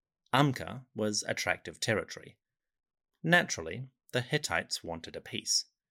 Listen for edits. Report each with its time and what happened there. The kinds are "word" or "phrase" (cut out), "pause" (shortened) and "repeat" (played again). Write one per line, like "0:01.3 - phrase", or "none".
none